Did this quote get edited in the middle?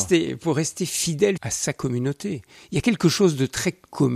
yes; 1 cut; at 1.4 s

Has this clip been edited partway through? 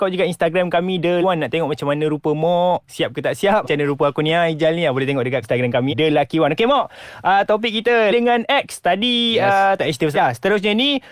yes; 7 cuts; at 1.2 s, 2.9 s, 3.6 s, 5.4 s, 5.9 s, 8.1 s, 10.1 s

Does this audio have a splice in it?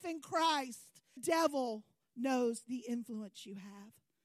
yes; 1 cut; at 1.2 s

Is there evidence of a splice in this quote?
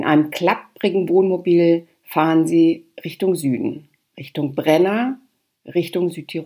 no; 0 cuts

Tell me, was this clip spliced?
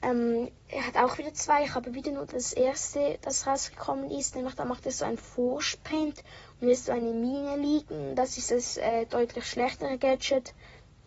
no; 0 cuts

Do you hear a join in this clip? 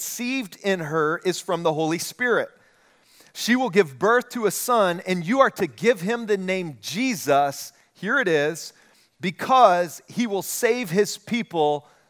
no; 0 cuts

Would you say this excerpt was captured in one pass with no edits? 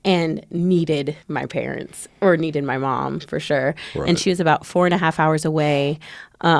no; 1 cut; at 1.2 s

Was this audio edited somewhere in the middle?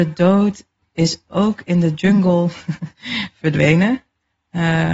no; 0 cuts

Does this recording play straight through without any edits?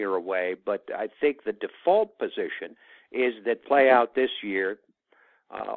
no; 1 cut; at 3.6 s

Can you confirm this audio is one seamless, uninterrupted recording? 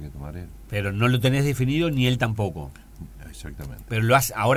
yes; 0 cuts

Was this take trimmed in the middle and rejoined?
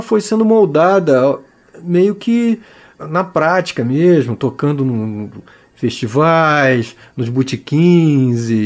no; 0 cuts

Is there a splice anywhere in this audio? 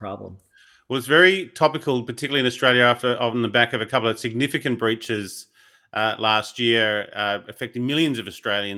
no; 0 cuts

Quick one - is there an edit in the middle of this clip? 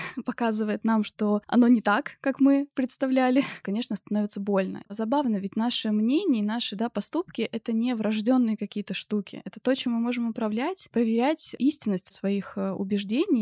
no; 0 cuts

